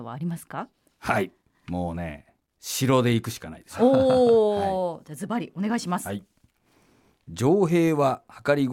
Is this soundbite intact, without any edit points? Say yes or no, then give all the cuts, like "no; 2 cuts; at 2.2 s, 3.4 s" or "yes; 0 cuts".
yes; 0 cuts